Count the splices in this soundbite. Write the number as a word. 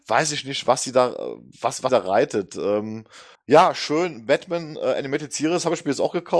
two